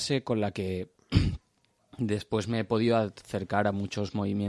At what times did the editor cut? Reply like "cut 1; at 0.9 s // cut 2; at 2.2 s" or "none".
none